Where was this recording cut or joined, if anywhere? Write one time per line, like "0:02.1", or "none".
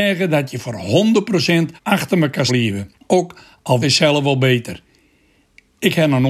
0:01.8
0:02.5
0:03.0
0:03.8